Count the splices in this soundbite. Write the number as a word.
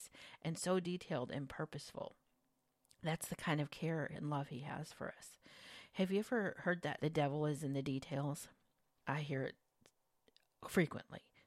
one